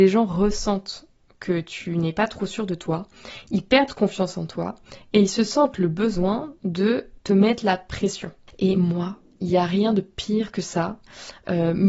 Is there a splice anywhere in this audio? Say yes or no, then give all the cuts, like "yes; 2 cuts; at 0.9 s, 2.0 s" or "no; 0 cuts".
no; 0 cuts